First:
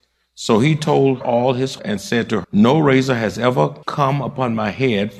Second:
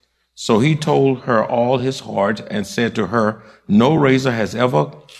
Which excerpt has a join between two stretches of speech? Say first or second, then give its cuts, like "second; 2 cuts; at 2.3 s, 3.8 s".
first; 4 cuts; at 1.2 s, 1.8 s, 2.4 s, 3.8 s